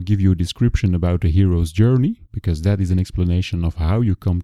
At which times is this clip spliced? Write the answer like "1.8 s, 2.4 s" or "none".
2.3 s